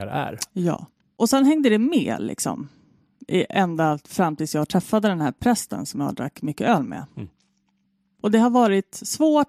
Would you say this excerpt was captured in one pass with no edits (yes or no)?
yes